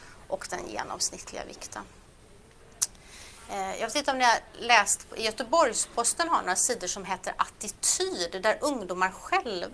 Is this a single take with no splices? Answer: yes; 0 cuts

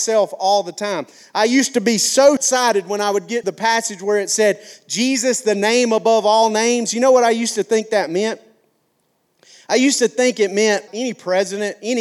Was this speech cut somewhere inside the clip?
yes; 3 cuts; at 2.4 s, 3.4 s, 10.9 s

